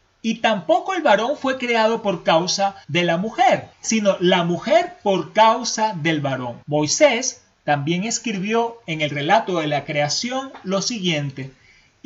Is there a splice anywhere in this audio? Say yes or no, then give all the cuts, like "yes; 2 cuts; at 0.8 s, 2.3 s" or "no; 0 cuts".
yes; 3 cuts; at 2.8 s, 3.7 s, 6.6 s